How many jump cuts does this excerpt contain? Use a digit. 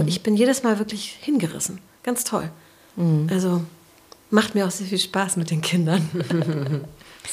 0